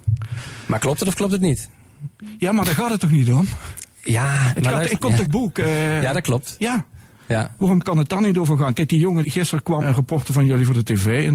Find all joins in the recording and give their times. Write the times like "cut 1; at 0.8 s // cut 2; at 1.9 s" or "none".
cut 1; at 5.2 s // cut 2; at 9.2 s // cut 3; at 9.8 s